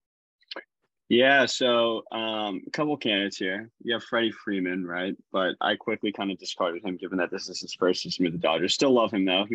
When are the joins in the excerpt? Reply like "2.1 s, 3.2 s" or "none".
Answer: none